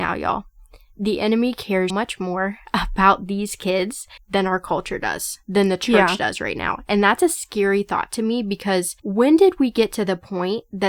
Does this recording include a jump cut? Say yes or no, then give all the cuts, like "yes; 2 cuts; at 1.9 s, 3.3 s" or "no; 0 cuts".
yes; 3 cuts; at 1.9 s, 4.2 s, 9.0 s